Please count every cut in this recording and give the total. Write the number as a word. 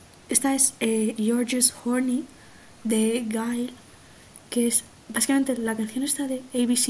zero